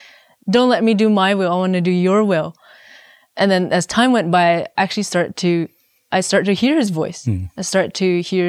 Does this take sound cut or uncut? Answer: uncut